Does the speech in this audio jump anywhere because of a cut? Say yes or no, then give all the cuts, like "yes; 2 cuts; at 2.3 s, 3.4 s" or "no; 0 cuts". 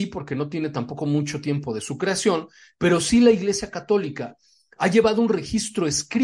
no; 0 cuts